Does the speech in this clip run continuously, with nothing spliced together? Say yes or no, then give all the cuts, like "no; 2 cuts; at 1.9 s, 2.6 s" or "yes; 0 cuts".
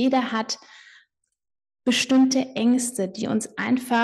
yes; 0 cuts